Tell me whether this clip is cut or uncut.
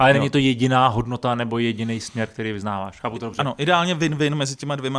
uncut